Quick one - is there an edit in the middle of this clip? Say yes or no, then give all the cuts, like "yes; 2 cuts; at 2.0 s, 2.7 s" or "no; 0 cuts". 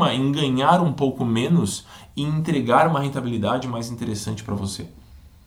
no; 0 cuts